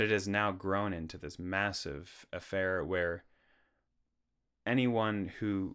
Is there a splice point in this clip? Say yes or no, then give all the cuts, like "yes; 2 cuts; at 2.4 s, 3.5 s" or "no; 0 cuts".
no; 0 cuts